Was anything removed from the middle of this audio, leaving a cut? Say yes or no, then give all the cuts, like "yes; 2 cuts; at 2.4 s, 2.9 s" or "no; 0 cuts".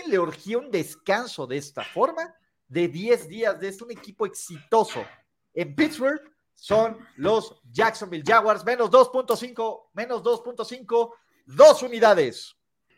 yes; 1 cut; at 3.8 s